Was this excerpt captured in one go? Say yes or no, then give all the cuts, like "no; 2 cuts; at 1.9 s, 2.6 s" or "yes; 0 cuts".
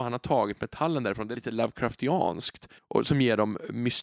no; 2 cuts; at 1.3 s, 2.8 s